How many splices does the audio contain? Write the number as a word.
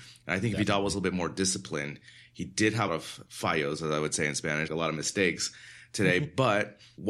three